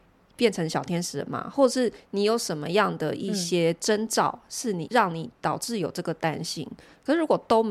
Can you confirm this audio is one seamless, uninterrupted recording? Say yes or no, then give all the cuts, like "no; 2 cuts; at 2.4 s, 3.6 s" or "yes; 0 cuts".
no; 1 cut; at 4.9 s